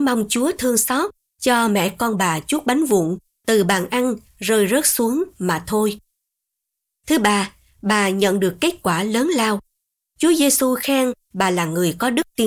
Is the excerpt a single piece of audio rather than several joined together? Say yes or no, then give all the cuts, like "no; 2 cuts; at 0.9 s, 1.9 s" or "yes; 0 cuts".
yes; 0 cuts